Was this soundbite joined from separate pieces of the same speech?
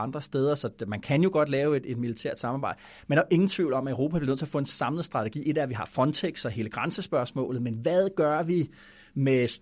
no; 0 cuts

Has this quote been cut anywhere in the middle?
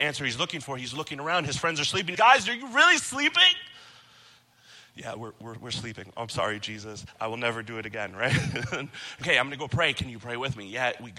yes; 2 cuts; at 2.1 s, 9.2 s

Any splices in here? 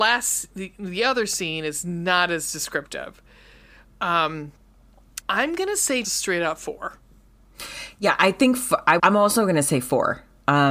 yes; 3 cuts; at 5.2 s, 6.0 s, 9.0 s

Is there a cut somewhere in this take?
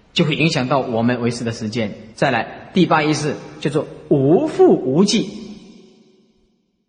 yes; 1 cut; at 2.1 s

